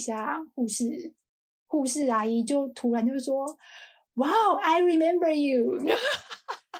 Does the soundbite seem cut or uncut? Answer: uncut